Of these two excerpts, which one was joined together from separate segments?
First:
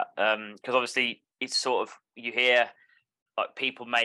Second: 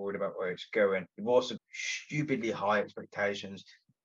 second; 2 cuts; at 1.1 s, 1.6 s

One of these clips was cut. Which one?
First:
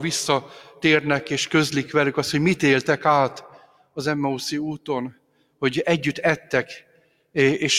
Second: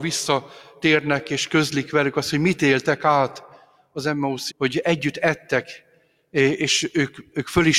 second; 1 cut; at 4.5 s

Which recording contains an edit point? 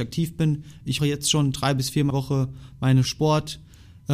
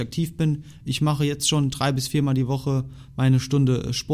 first; 3 cuts; at 1.0 s, 2.1 s, 3.0 s

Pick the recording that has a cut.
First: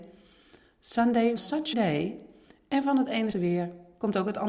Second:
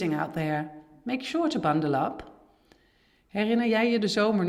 first; 3 cuts; at 1.4 s, 1.7 s, 3.3 s

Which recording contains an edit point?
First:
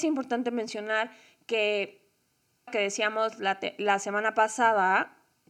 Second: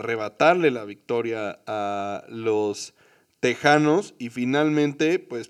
first; 1 cut; at 2.7 s

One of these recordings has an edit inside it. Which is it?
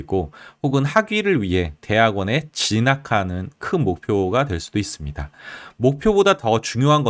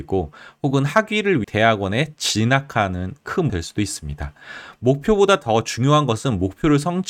second; 2 cuts; at 1.4 s, 3.5 s

